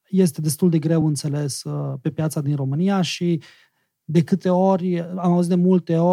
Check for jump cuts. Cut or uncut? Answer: uncut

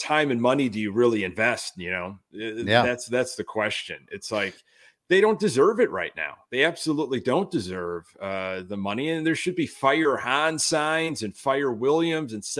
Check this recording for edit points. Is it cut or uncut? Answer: uncut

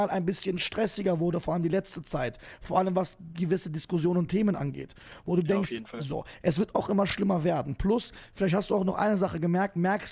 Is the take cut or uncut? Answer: uncut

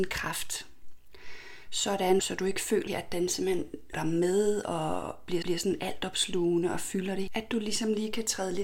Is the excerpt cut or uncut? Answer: cut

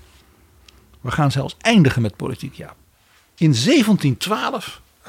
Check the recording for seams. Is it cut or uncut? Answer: uncut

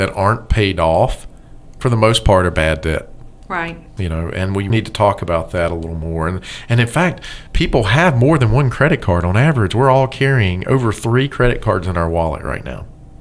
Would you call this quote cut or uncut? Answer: cut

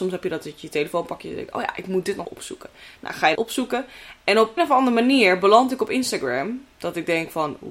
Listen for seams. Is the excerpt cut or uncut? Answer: cut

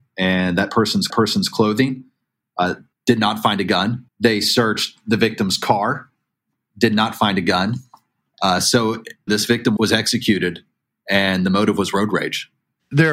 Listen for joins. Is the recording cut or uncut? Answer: cut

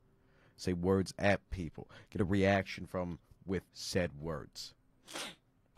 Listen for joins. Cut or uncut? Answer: cut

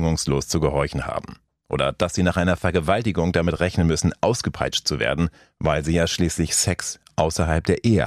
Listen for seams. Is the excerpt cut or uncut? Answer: uncut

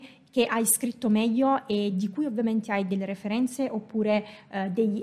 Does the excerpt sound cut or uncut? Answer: uncut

